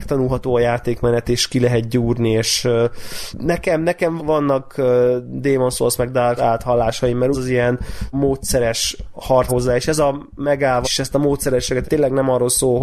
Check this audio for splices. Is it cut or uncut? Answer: cut